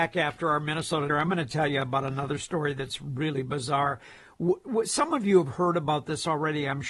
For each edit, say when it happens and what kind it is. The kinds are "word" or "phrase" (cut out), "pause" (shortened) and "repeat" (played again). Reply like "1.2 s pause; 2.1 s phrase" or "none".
1.1 s phrase